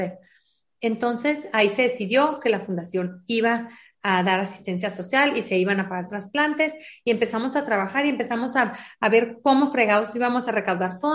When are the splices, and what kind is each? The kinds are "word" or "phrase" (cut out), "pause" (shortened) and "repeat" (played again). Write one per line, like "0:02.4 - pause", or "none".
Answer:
none